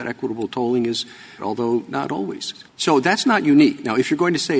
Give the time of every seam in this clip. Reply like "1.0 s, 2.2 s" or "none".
1.4 s, 2.7 s